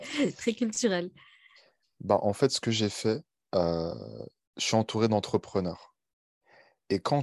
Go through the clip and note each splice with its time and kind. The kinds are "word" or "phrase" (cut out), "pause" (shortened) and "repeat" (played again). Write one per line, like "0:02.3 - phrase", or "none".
none

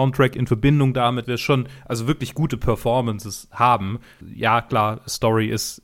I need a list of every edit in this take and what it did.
0:01.2 - word
0:04.2 - word

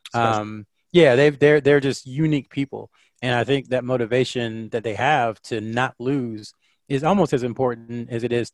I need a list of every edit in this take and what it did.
none

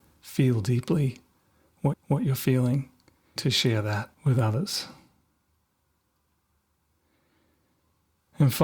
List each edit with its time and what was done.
0:01.9 - repeat
0:03.4 - phrase
0:04.1 - pause

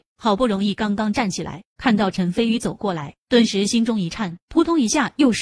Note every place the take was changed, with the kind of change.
0:04.4 - phrase

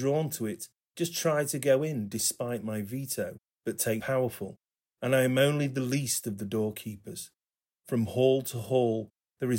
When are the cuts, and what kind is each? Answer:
0:03.4 - pause
0:04.0 - phrase

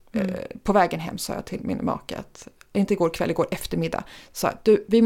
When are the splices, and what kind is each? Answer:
none

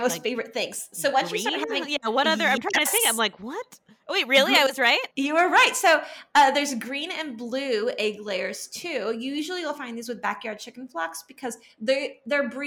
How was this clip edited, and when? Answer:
0:05.1 - pause

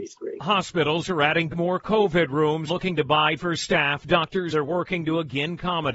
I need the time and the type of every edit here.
0:01.5 - word
0:02.7 - word
0:03.4 - word
0:04.5 - word

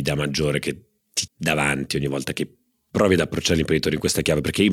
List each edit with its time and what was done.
0:01.3 - word

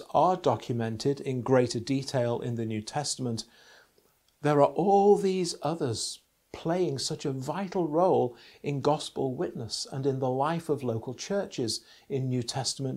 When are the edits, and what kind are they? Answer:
none

